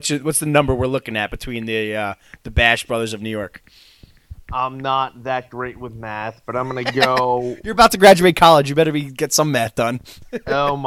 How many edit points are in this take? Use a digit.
0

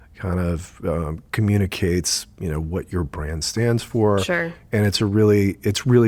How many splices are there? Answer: 0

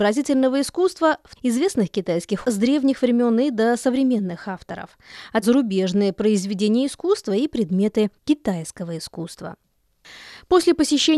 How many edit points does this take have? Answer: 3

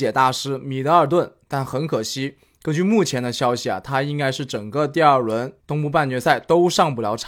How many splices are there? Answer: 1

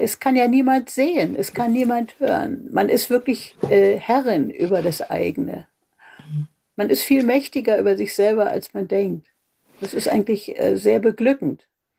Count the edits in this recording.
0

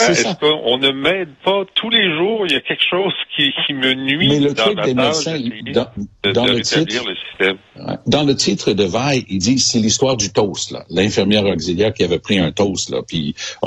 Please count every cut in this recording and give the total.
0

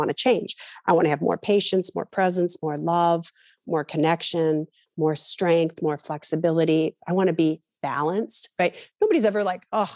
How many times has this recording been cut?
0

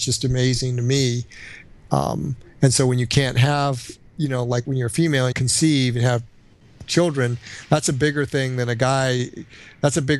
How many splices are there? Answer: 2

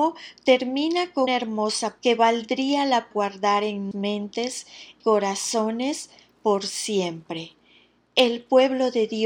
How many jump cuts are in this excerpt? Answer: 5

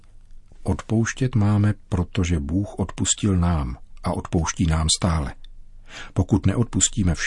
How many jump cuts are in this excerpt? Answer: 0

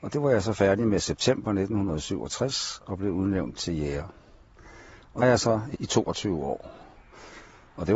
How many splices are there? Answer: 2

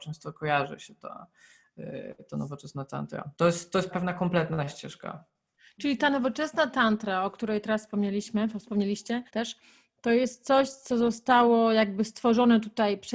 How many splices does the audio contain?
3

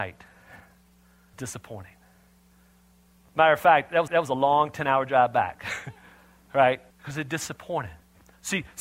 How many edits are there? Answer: 3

